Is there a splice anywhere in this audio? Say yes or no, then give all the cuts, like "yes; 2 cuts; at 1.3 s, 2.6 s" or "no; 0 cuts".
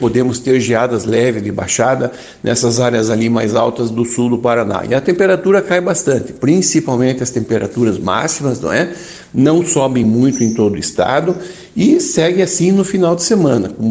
no; 0 cuts